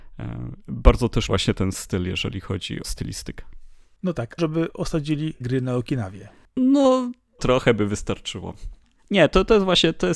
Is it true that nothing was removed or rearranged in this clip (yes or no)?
no